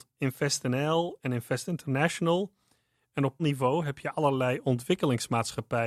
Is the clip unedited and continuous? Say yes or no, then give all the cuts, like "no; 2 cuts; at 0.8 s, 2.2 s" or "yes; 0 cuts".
no; 1 cut; at 3.4 s